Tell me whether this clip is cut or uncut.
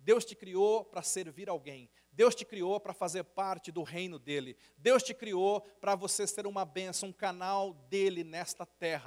uncut